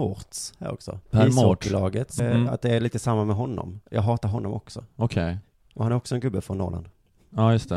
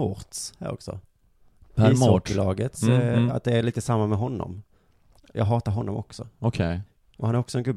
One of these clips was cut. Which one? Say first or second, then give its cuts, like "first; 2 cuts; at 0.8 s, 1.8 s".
first; 3 cuts; at 1.0 s, 2.2 s, 3.9 s